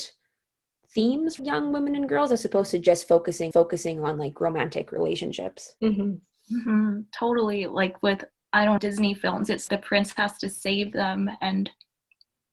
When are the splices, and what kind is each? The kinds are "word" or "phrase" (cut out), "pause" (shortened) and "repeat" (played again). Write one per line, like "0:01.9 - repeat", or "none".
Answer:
0:01.4 - word
0:03.5 - repeat
0:05.8 - pause
0:08.4 - pause
0:08.8 - word
0:09.7 - word